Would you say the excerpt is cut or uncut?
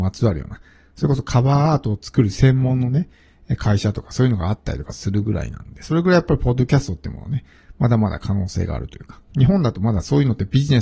uncut